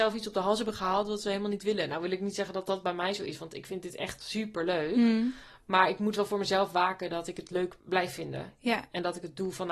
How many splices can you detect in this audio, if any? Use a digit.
1